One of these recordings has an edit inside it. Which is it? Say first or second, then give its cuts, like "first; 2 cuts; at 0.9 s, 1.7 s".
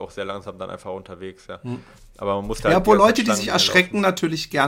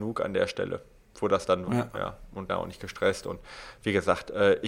second; 2 cuts; at 1.6 s, 2.5 s